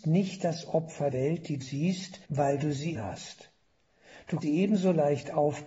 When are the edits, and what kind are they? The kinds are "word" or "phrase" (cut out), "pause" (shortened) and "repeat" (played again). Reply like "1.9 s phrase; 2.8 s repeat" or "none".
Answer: 1.1 s word; 1.6 s word; 2.2 s pause; 2.9 s word; 4.4 s word